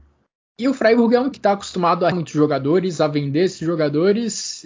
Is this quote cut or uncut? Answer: cut